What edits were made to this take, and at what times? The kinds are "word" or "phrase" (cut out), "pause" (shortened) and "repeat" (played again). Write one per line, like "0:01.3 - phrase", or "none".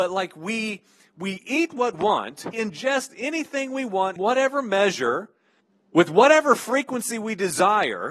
0:01.9 - word
0:02.5 - word
0:04.2 - word
0:05.6 - pause